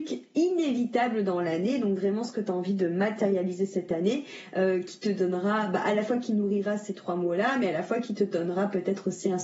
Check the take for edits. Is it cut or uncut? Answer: uncut